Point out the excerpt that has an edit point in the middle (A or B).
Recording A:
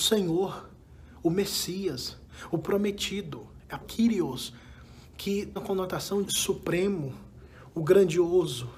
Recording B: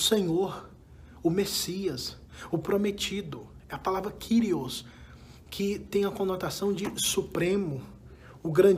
A